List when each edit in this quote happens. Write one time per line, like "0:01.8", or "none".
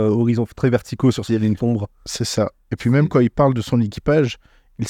0:01.3
0:01.6